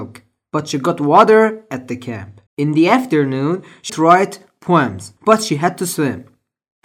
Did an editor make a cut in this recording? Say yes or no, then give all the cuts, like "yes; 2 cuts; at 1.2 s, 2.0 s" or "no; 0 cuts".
yes; 3 cuts; at 2.5 s, 3.9 s, 5.2 s